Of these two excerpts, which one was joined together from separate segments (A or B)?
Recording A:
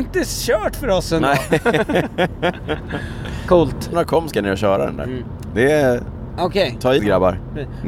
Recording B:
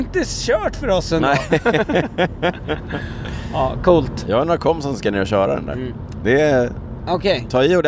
A